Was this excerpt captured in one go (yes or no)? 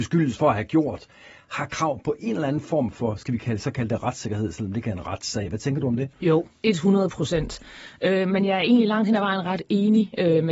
no